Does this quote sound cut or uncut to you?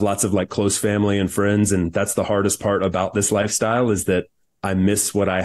uncut